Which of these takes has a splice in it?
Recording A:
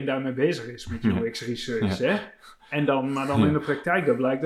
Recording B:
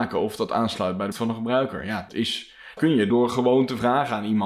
B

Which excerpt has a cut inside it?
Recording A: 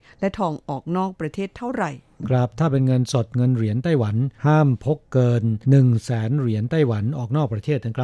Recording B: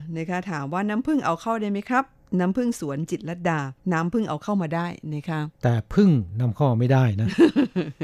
A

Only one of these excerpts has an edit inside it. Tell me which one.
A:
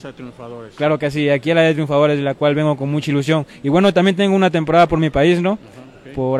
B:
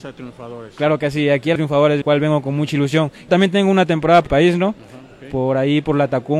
B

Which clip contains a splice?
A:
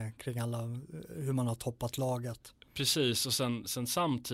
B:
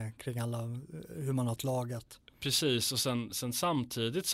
B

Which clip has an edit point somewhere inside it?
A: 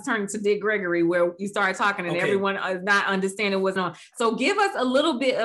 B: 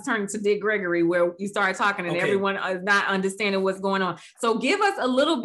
A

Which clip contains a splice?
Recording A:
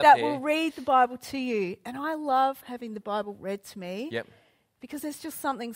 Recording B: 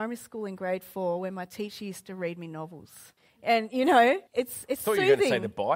B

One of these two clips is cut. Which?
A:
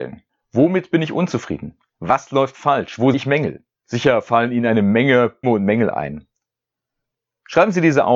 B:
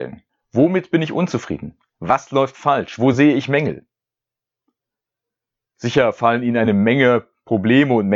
A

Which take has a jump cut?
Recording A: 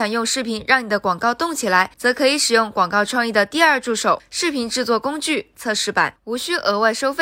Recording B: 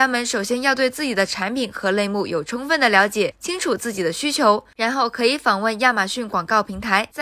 A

